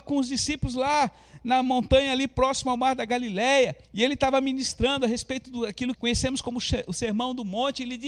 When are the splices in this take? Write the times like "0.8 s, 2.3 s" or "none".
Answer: 3.8 s, 6.0 s